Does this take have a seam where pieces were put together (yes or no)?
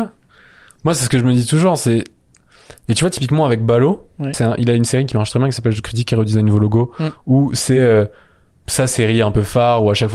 no